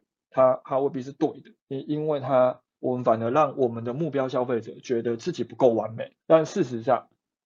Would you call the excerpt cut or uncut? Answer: cut